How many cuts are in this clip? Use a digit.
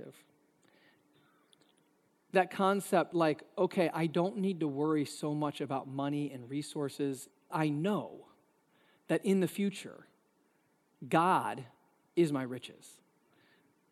2